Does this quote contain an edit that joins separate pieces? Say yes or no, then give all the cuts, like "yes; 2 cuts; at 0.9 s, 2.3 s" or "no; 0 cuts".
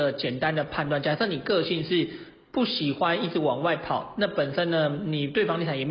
no; 0 cuts